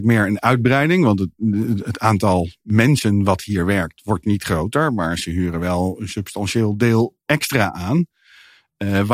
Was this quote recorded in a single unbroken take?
yes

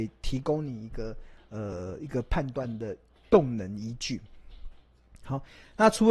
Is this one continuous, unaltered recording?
yes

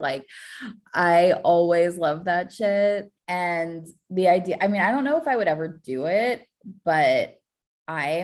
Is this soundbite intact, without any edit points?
no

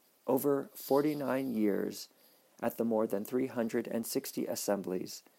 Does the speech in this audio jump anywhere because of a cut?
no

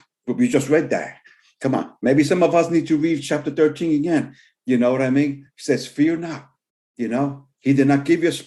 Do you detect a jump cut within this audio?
no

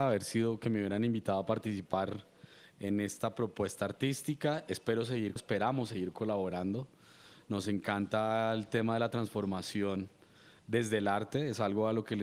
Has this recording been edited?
yes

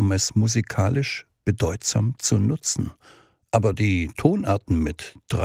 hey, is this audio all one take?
yes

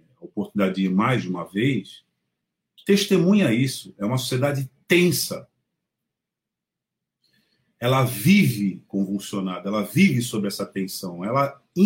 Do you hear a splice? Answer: no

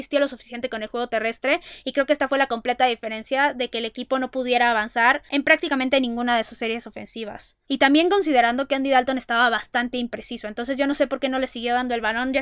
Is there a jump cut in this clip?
no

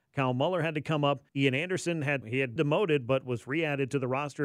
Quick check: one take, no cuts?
no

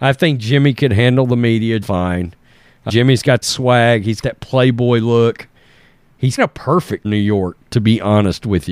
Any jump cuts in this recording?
yes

